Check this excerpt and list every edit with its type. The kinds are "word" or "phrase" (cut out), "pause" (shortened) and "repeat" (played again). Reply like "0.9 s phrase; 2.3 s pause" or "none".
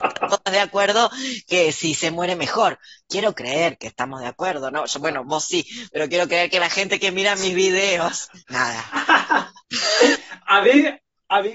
8.4 s pause